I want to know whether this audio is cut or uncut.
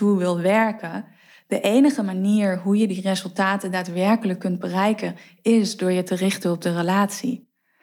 uncut